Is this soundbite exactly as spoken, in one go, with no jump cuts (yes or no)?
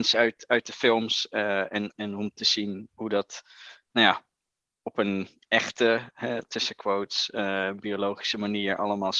yes